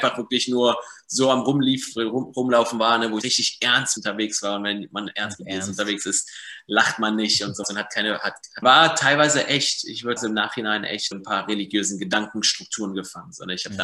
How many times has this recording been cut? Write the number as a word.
six